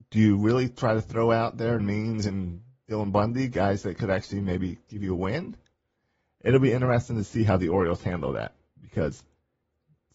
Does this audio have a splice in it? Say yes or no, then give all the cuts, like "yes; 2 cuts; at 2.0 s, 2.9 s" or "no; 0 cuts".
yes; 1 cut; at 1.8 s